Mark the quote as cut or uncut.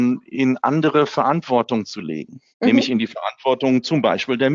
cut